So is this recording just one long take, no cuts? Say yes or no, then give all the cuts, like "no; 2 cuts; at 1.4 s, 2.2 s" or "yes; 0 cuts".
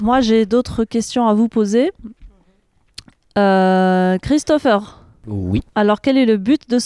yes; 0 cuts